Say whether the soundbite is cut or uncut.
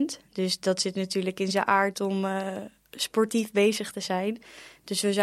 uncut